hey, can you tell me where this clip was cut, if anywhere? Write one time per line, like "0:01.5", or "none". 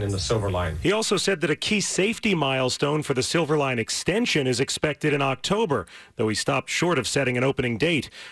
none